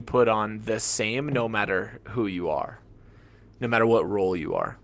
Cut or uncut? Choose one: uncut